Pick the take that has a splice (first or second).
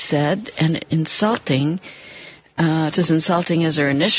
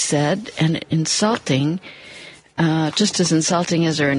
first